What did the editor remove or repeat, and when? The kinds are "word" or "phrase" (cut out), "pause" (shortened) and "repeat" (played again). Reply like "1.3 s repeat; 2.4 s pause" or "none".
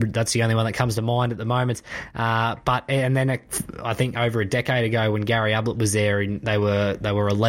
none